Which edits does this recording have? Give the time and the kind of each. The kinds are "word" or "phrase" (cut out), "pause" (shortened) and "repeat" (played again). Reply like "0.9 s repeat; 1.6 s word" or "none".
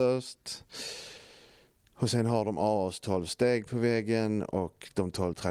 none